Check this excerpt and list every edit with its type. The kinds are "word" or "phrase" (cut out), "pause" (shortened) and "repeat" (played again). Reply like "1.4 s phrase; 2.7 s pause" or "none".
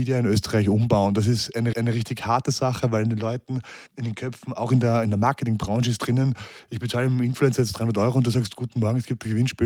1.7 s repeat; 3.9 s pause